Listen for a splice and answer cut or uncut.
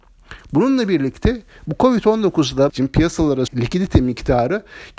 cut